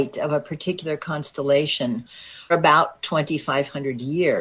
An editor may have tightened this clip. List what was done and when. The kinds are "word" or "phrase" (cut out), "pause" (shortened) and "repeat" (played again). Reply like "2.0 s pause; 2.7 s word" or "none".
2.5 s word